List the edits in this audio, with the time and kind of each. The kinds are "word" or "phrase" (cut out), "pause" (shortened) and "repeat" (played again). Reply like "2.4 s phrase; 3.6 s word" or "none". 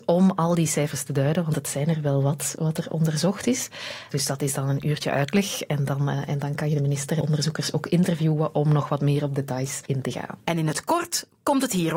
7.2 s word